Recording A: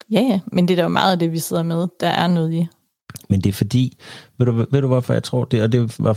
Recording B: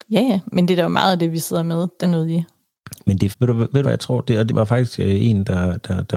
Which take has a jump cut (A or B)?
B